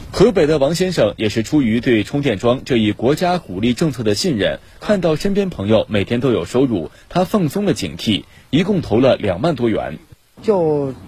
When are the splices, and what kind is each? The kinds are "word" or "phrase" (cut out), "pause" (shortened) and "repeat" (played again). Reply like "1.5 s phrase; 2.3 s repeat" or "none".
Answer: none